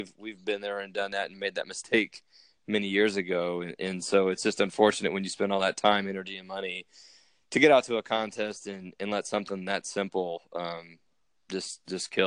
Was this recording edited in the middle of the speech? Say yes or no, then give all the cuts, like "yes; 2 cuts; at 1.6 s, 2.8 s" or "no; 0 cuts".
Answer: no; 0 cuts